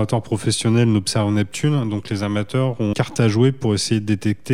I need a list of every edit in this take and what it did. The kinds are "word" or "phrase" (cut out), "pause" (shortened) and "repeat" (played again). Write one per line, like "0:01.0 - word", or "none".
0:02.9 - word